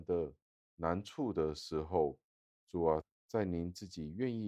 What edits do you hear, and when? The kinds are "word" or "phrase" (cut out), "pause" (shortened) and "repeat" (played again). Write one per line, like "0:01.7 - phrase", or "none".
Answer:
none